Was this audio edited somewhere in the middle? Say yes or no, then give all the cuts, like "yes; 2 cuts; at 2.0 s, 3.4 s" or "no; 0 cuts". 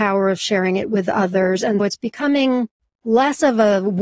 yes; 1 cut; at 1.8 s